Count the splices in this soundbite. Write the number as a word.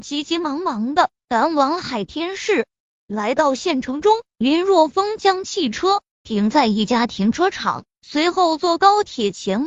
one